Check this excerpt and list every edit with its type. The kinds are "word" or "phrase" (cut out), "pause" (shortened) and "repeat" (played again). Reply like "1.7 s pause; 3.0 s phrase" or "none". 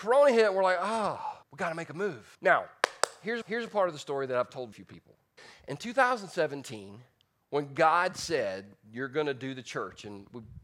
1.4 s pause; 2.3 s pause; 3.4 s repeat; 4.7 s word; 5.4 s pause; 7.2 s pause